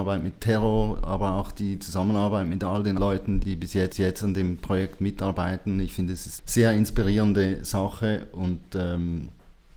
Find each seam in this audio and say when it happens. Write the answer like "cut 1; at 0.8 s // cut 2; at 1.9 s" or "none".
cut 1; at 3.0 s // cut 2; at 3.4 s // cut 3; at 3.9 s // cut 4; at 6.4 s